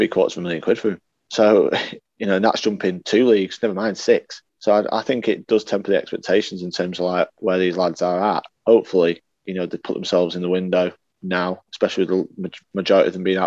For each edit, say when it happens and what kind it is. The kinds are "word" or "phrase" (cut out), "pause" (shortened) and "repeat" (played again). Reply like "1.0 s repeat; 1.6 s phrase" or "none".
1.1 s pause; 4.5 s pause; 8.6 s pause; 11.1 s pause